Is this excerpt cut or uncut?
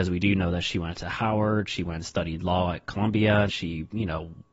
cut